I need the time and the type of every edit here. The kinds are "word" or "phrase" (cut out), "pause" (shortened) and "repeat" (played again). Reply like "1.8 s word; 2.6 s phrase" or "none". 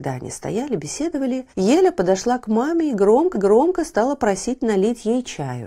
1.5 s pause; 3.3 s repeat